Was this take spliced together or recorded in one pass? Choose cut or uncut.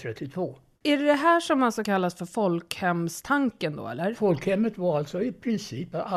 cut